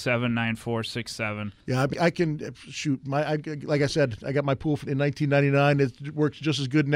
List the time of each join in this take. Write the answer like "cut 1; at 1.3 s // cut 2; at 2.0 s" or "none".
cut 1; at 1.6 s // cut 2; at 1.9 s // cut 3; at 4.8 s